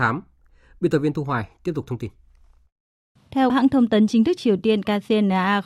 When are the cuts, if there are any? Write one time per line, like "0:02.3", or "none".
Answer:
none

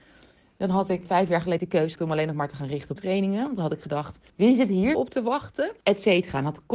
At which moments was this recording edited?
0:01.1
0:01.6
0:02.0
0:03.0
0:04.3
0:04.9
0:05.8

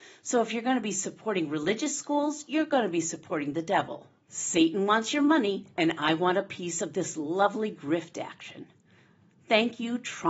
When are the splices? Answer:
none

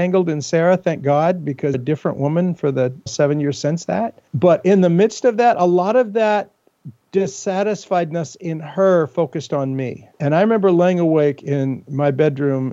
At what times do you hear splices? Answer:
0:01.7
0:03.1
0:04.3
0:10.1

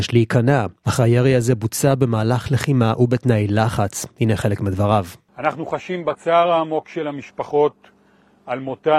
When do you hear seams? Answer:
none

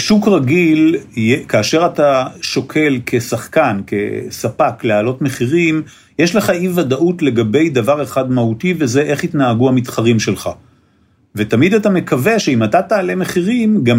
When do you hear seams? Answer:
none

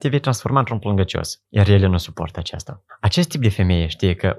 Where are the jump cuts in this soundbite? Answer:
none

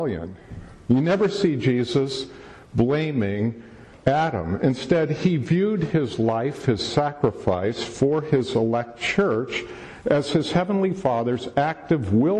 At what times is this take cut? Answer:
0:03.9

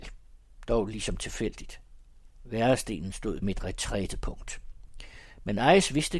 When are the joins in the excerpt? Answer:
0:03.4

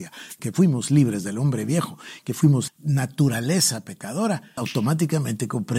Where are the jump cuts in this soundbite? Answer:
0:02.7
0:04.6

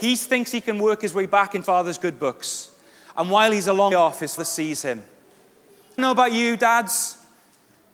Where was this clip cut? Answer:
0:01.6
0:03.9
0:04.4
0:06.0

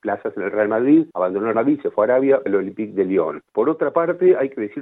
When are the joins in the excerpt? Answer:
0:01.1
0:01.5
0:02.5
0:03.5

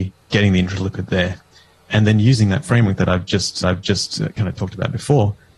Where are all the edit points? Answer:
0:01.9
0:03.6

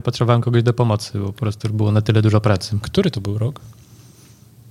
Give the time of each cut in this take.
none

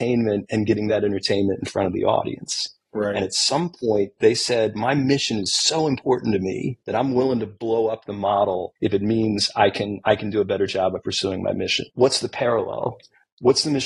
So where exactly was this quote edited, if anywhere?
0:06.8
0:08.8
0:11.9

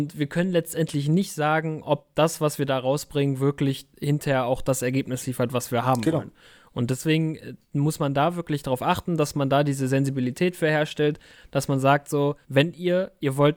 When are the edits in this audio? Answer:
0:12.4

